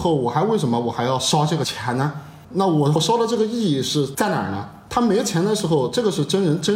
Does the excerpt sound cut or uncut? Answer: cut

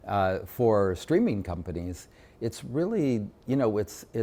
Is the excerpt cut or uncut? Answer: uncut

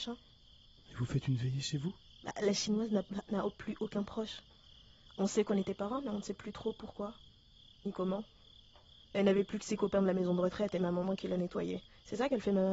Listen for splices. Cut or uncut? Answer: uncut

